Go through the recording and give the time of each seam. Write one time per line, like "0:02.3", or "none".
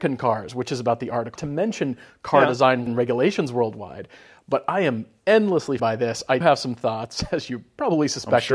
0:01.4
0:02.9
0:05.8
0:06.4